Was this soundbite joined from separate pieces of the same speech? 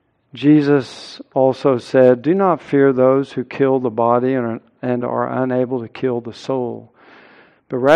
no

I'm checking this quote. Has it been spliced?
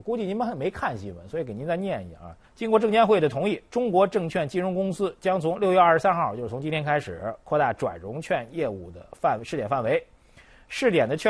yes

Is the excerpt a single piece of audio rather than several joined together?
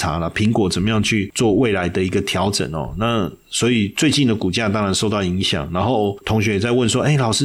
yes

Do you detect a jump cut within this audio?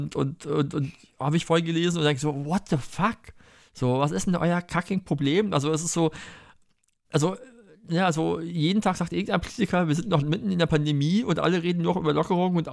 no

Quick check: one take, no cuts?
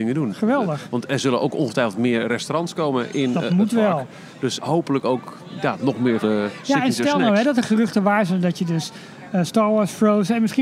no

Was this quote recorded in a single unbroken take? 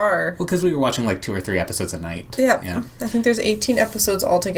yes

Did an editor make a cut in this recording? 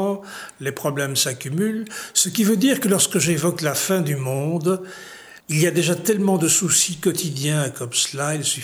yes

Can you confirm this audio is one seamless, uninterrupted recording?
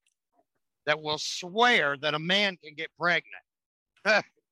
yes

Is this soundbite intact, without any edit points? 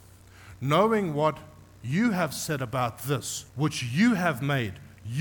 no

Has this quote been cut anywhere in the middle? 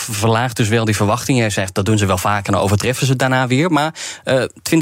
no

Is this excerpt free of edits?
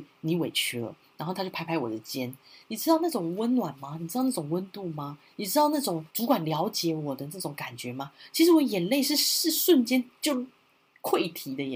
no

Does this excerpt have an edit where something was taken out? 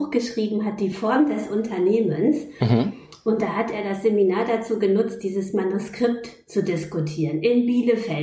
no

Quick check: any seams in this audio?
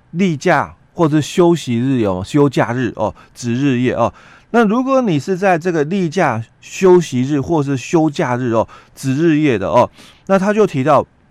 no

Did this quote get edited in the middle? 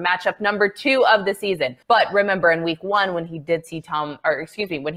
yes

